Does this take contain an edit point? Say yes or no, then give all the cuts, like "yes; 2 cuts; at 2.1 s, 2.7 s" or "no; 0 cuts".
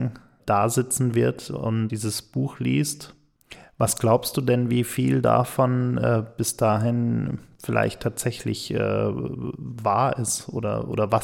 no; 0 cuts